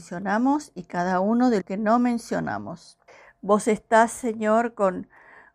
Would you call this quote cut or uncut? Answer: cut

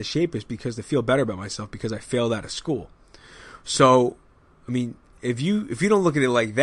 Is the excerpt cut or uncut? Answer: uncut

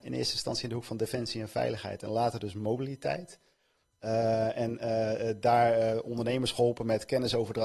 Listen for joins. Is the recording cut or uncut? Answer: uncut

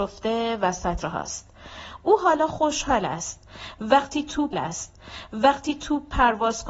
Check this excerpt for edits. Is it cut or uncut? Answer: cut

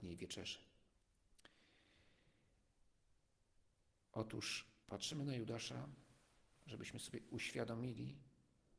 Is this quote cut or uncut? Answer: cut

